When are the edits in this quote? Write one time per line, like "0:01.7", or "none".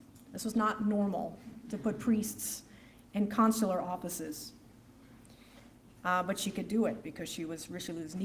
none